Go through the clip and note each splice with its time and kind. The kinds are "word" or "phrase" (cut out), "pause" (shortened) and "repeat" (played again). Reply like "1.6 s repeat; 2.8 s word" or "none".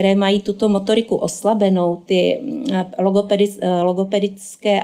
none

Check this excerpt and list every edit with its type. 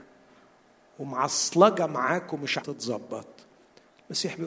2.6 s word

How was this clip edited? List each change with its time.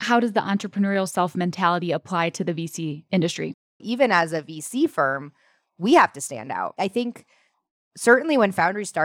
none

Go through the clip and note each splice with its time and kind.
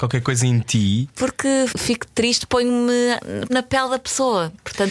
1.7 s word; 2.5 s word; 3.5 s word

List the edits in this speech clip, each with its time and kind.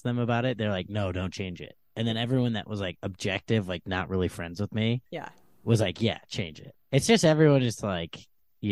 5.1 s pause; 6.8 s pause

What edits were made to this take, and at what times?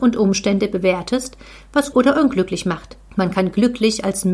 1.9 s word

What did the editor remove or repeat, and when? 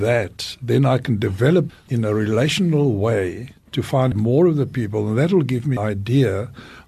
1.7 s word; 4.1 s word; 5.8 s word

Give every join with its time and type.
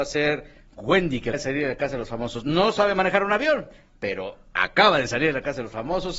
1.3 s word

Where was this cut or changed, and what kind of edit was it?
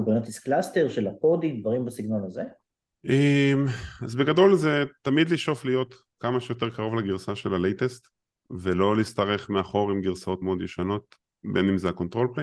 8.2 s pause; 10.4 s word

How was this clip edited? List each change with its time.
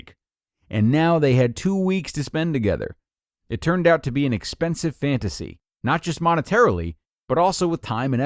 none

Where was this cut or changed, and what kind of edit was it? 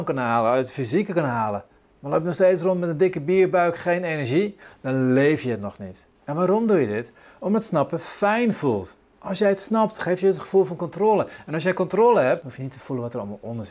1.8 s pause; 6.2 s pause; 12.4 s word

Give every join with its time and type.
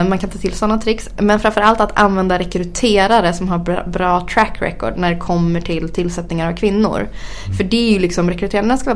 none

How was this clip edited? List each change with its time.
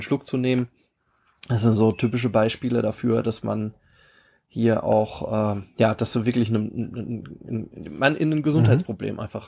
none

